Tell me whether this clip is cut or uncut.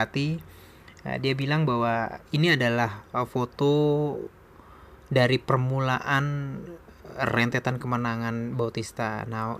uncut